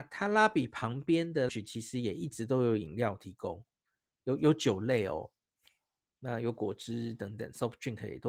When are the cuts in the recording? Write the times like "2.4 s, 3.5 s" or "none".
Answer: 1.5 s